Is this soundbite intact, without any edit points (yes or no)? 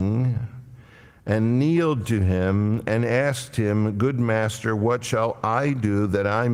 yes